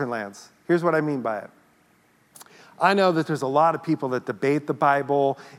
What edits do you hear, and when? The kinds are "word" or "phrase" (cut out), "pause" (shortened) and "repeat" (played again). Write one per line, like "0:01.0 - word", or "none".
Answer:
none